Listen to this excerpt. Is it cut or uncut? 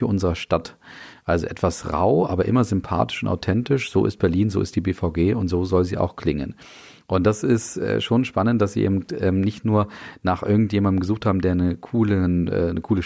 uncut